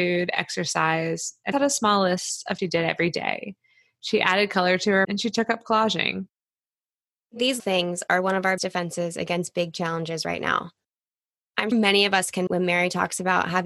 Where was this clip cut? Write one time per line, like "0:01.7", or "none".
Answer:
0:01.5
0:02.6
0:05.0
0:07.6
0:08.6
0:11.7
0:12.5